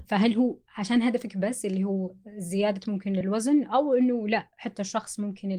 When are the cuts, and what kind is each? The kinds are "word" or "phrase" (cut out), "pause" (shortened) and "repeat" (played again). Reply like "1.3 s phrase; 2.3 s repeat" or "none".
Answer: none